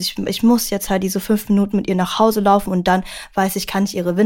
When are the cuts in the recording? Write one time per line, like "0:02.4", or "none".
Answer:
none